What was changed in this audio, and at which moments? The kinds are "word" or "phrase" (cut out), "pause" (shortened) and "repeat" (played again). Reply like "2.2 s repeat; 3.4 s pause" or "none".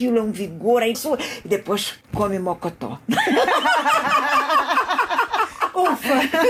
0.9 s phrase; 2.0 s pause